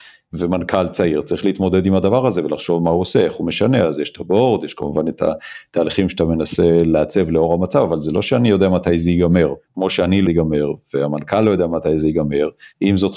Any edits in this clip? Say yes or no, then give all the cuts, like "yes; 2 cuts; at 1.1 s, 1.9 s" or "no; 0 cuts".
yes; 2 cuts; at 9.6 s, 10.2 s